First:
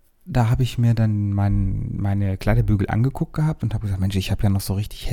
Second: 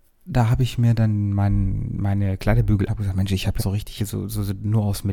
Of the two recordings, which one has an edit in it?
second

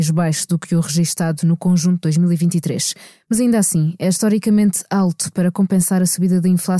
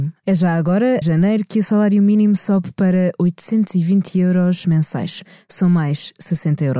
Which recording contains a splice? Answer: second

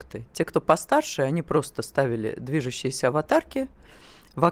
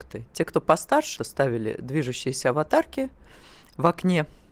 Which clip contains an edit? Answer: second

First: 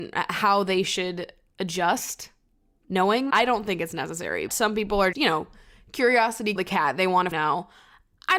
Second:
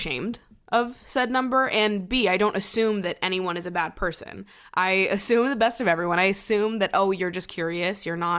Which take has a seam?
first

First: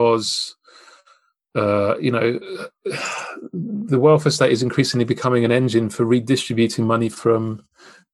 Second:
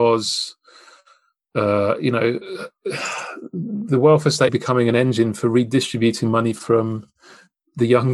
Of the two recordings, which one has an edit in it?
second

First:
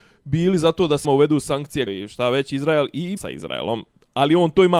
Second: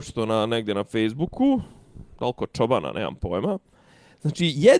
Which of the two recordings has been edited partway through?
first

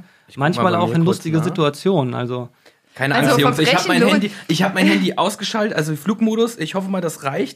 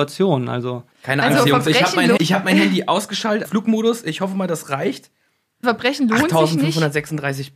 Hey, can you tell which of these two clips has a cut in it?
second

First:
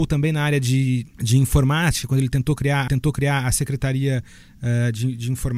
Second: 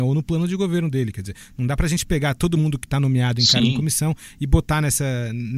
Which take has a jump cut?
first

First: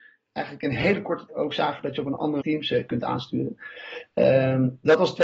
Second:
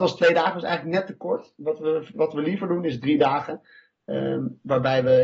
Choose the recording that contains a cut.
first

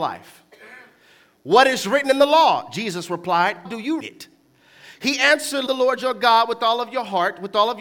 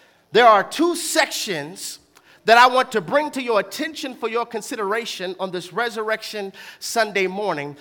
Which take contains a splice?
first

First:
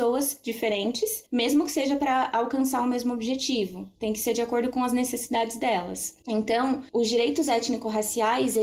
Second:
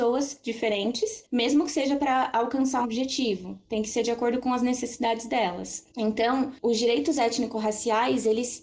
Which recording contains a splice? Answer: second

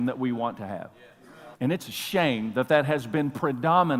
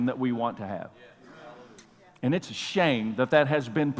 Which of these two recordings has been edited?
first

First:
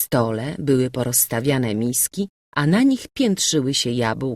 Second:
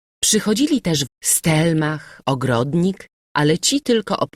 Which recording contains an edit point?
second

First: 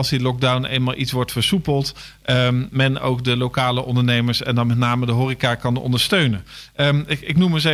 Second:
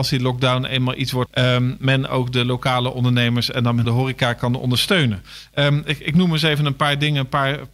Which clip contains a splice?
second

